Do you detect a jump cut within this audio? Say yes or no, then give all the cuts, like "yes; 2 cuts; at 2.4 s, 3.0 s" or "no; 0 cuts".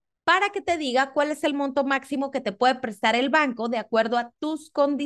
no; 0 cuts